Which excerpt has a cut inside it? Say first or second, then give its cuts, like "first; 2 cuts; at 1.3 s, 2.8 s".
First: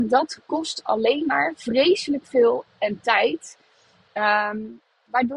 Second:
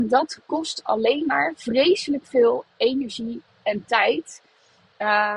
first; 1 cut; at 2.7 s